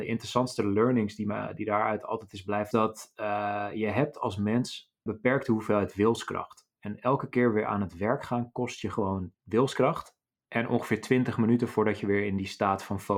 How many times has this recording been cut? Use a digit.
3